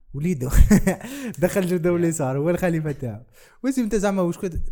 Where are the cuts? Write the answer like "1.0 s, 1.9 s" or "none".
none